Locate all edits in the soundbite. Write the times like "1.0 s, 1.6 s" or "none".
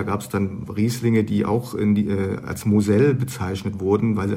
none